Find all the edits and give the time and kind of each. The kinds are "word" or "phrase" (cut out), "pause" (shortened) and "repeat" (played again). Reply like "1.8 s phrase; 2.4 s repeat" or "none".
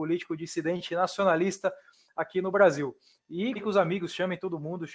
3.6 s word